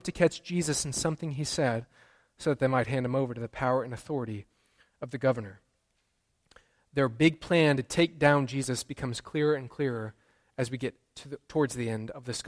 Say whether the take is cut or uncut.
uncut